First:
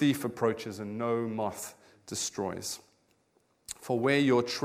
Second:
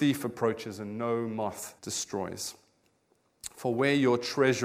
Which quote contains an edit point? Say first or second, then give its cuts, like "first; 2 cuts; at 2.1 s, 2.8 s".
second; 1 cut; at 1.8 s